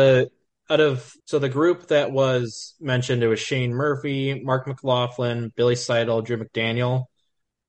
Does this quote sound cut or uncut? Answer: cut